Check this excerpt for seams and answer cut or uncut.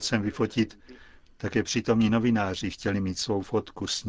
uncut